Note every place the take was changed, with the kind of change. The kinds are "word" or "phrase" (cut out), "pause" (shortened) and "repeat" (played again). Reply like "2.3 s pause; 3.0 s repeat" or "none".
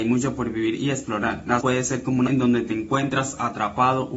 1.6 s word; 2.3 s word